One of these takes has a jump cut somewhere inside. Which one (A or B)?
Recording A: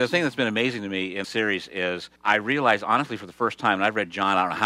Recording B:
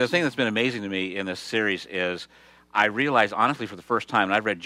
A